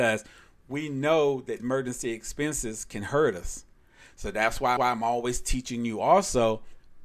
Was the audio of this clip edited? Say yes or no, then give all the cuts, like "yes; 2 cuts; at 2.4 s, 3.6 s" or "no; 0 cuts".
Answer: yes; 2 cuts; at 1.6 s, 4.8 s